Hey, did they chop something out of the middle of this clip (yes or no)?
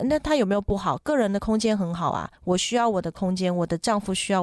yes